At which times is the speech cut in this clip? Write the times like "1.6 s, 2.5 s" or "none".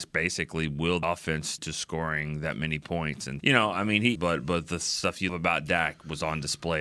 1.0 s, 1.6 s, 3.4 s, 4.2 s, 5.3 s